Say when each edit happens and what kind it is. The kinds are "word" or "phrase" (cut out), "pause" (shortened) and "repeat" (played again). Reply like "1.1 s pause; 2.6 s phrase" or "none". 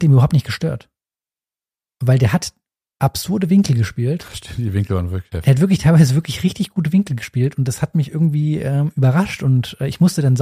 none